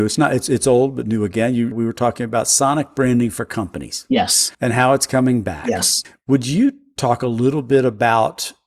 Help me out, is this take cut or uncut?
cut